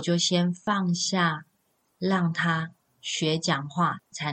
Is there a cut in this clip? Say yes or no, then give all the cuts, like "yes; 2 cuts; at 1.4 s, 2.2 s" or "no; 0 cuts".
no; 0 cuts